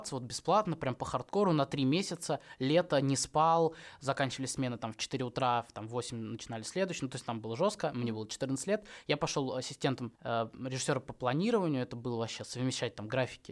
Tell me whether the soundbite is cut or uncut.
cut